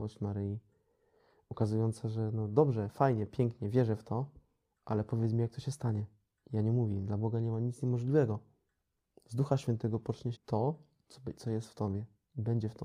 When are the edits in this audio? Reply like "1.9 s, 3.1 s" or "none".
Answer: 6.3 s, 10.3 s